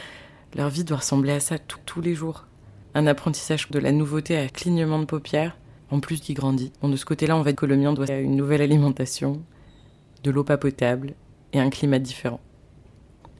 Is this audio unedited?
no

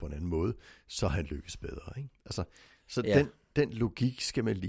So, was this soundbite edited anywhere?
no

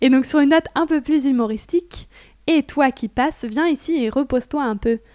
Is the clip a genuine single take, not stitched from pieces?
yes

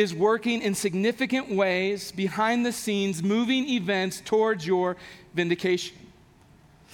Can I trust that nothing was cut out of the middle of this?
yes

